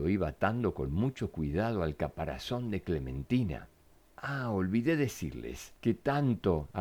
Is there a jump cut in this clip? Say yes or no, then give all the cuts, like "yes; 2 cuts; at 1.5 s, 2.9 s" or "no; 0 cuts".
yes; 1 cut; at 4.0 s